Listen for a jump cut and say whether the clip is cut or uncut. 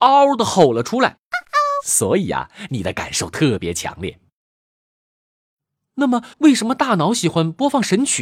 cut